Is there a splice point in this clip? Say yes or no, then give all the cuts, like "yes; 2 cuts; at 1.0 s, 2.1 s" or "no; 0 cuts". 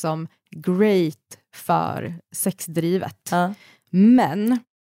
no; 0 cuts